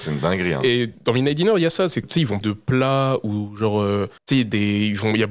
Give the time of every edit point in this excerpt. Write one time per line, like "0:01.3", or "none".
0:02.0
0:02.4
0:04.2